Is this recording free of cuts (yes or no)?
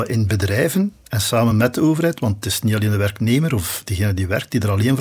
yes